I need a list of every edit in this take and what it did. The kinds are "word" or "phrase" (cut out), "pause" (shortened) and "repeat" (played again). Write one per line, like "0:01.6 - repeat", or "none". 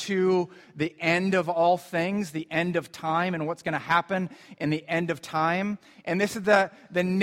none

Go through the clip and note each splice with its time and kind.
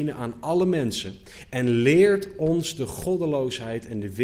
none

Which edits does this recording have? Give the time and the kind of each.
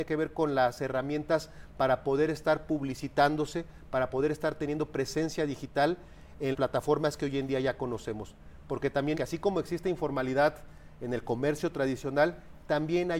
0:06.5 - word
0:09.1 - phrase

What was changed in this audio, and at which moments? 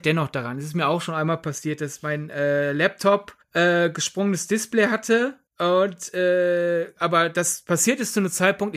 0:03.4 - pause
0:05.5 - pause

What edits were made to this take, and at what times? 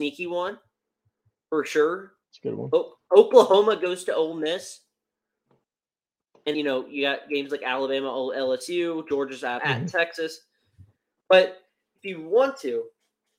0:02.2 - pause
0:06.5 - word
0:09.6 - phrase

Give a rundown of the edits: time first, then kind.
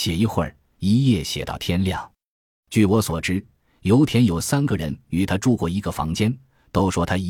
none

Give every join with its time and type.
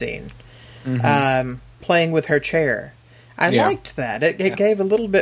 0:01.8 - word

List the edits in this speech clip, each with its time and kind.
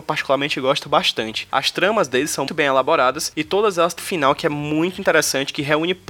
0:02.5 - word
0:04.0 - word

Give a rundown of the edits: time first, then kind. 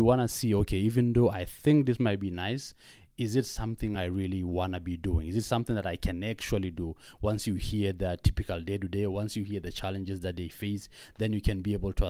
none

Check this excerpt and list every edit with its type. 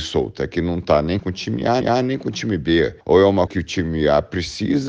0:01.2 - word
0:01.8 - repeat
0:03.0 - pause
0:03.5 - word

